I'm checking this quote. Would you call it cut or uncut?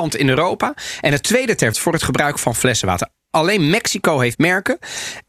cut